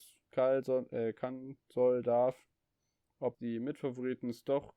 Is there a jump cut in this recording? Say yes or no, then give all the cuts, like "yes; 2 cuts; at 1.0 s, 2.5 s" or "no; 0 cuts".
yes; 1 cut; at 3.3 s